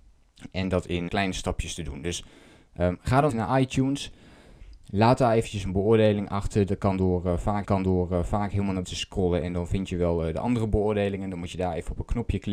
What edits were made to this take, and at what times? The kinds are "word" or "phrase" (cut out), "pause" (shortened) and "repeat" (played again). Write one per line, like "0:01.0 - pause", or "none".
0:01.1 - word
0:03.3 - word
0:04.8 - pause
0:07.6 - repeat
0:08.8 - word